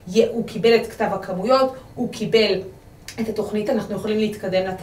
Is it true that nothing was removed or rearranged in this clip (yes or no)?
no